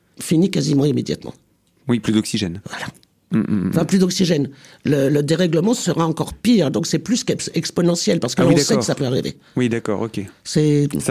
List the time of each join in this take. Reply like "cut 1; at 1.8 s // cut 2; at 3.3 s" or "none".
none